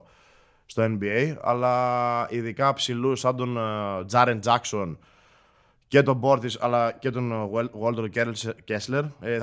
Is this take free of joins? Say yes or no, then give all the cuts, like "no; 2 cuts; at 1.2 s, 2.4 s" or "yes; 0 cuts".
yes; 0 cuts